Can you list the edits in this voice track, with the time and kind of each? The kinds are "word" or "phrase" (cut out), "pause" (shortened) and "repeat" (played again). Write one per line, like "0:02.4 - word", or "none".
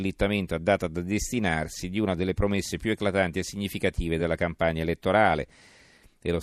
none